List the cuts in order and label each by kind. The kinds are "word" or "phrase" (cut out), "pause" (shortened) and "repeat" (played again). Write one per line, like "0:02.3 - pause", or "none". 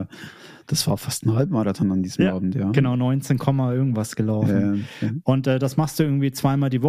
none